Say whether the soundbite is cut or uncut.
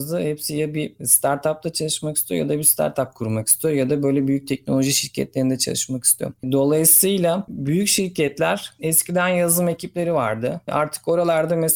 uncut